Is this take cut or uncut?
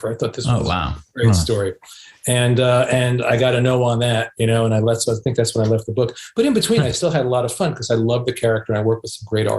uncut